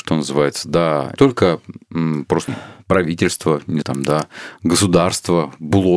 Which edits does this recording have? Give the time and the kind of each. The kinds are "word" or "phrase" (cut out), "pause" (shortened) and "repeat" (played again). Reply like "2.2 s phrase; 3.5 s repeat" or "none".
1.2 s word; 2.5 s phrase; 3.8 s word